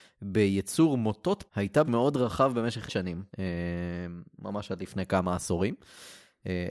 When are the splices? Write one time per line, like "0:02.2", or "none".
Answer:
0:01.5
0:01.8
0:02.9
0:03.3